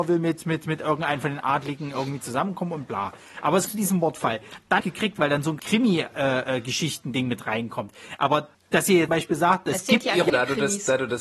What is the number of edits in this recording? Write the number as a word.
six